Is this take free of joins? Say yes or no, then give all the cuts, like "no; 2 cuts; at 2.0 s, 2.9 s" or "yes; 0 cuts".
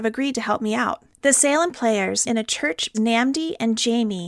no; 4 cuts; at 1.1 s, 1.7 s, 2.2 s, 2.9 s